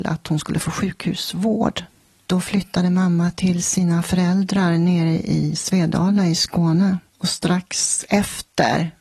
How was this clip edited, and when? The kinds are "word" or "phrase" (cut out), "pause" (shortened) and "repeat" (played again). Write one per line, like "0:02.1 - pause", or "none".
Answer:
none